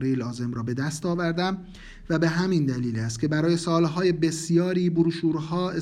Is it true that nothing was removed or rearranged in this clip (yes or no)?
yes